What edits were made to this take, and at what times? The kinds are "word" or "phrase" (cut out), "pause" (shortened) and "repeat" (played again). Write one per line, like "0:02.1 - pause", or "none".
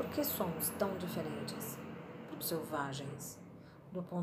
0:02.4 - phrase